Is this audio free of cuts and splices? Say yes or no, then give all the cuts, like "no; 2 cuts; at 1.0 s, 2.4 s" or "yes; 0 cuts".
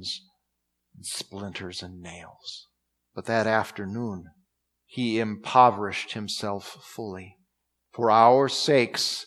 no; 3 cuts; at 2.9 s, 4.5 s, 7.6 s